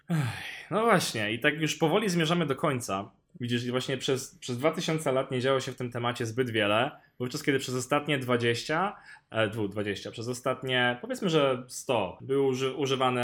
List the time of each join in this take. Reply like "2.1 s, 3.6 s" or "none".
none